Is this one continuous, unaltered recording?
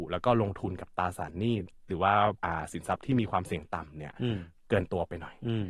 no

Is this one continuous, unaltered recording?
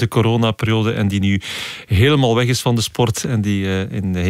yes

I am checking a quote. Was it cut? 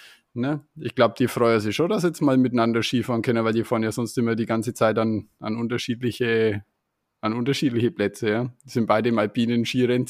no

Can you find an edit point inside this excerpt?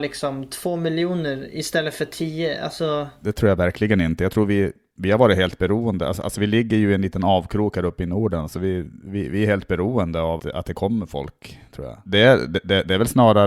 yes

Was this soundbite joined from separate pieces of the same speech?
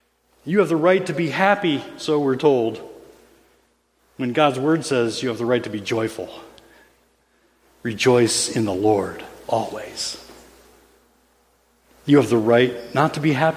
no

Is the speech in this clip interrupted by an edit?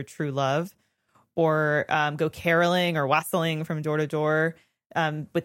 no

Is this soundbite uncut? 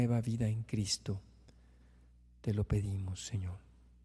yes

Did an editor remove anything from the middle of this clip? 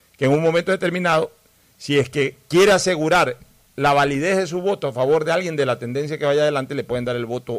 no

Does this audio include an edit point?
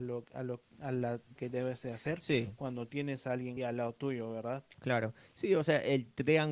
yes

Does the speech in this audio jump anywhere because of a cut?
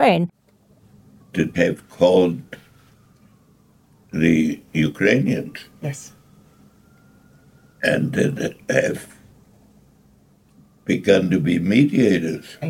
yes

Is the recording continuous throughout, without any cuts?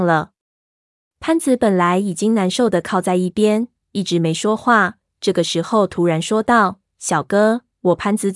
yes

